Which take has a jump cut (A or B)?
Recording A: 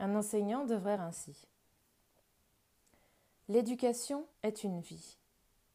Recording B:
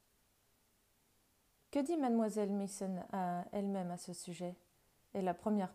A